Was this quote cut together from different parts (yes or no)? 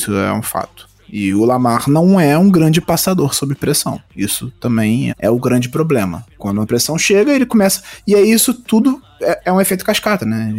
yes